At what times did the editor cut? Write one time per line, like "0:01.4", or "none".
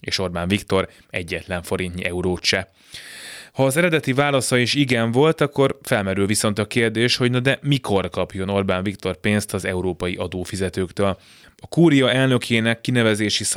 none